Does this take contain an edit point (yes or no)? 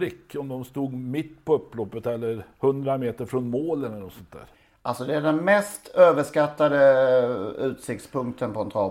yes